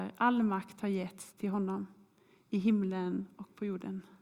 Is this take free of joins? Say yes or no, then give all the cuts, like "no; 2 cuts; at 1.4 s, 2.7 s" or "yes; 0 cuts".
yes; 0 cuts